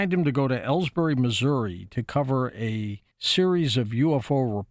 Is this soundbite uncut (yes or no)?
no